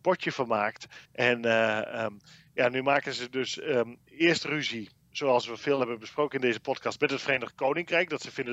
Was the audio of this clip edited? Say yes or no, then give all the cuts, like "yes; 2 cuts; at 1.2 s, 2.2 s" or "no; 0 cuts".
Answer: yes; 1 cut; at 1.0 s